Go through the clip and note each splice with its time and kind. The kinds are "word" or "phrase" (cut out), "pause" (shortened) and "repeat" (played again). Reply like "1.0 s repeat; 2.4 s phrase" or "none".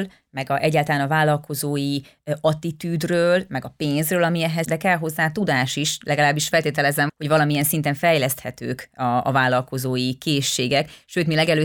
4.6 s word; 7.1 s word